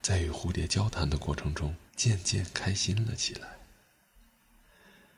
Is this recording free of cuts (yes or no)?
no